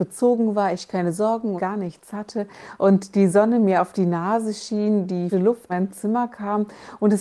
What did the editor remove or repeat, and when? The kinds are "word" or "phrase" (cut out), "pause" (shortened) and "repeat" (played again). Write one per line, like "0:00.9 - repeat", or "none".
0:01.6 - word
0:05.3 - word
0:05.7 - word